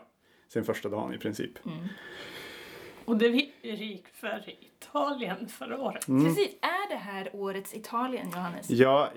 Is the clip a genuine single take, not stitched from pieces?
no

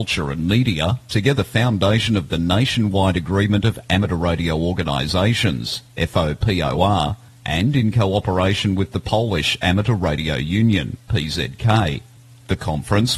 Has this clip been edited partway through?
yes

